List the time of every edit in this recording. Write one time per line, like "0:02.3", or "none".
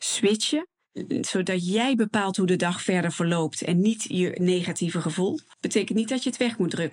none